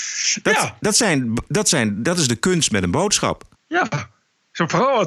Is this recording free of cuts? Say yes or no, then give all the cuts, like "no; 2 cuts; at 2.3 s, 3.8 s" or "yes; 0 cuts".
no; 1 cut; at 3.6 s